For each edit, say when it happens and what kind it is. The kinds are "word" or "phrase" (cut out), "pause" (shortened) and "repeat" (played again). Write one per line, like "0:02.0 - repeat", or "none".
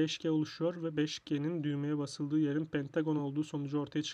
none